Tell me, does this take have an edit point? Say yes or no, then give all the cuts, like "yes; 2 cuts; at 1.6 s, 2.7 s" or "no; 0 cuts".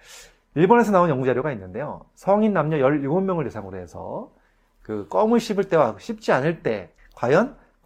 no; 0 cuts